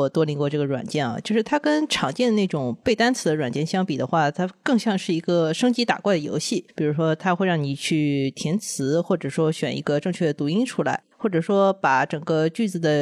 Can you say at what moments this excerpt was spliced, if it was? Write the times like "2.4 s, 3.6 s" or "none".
none